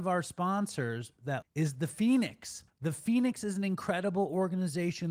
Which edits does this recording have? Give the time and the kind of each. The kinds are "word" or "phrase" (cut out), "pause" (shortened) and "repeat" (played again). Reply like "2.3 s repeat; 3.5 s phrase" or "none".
1.4 s phrase; 2.7 s pause